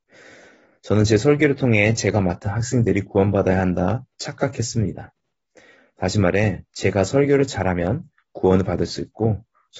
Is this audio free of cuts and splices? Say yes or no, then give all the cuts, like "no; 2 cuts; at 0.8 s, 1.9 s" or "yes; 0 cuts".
no; 1 cut; at 6.7 s